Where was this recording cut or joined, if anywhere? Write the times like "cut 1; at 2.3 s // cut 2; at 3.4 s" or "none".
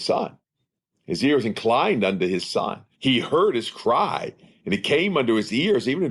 cut 1; at 2.9 s